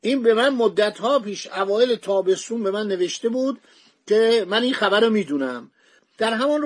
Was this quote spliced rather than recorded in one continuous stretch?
no; 0 cuts

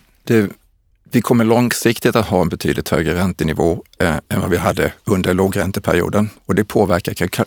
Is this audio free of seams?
yes; 0 cuts

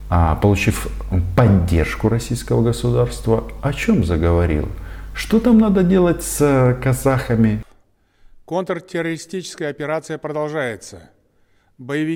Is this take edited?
no; 0 cuts

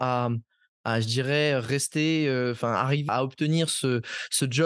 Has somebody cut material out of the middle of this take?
yes; 1 cut; at 3.1 s

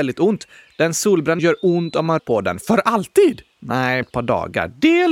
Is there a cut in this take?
yes; 3 cuts; at 1.4 s, 2.2 s, 4.0 s

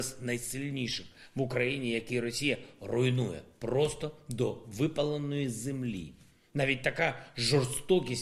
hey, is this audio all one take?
yes; 0 cuts

